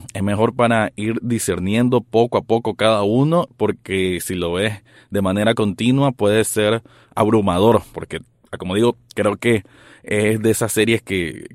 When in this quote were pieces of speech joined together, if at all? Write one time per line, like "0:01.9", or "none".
0:07.9